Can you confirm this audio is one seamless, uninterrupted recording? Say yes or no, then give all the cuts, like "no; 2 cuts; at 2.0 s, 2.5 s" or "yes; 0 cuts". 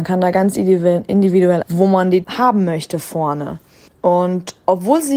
no; 3 cuts; at 1.6 s, 2.2 s, 3.9 s